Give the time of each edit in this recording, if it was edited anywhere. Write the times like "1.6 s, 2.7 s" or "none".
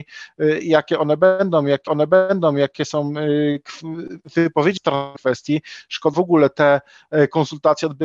1.9 s, 4.8 s, 5.2 s, 6.1 s